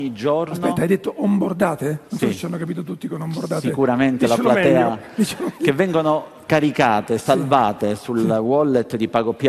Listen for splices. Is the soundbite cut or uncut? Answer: cut